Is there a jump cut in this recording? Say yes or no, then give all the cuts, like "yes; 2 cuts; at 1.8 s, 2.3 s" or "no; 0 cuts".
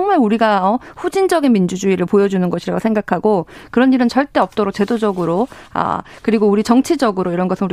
no; 0 cuts